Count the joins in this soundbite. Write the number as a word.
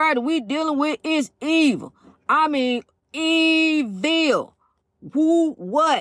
zero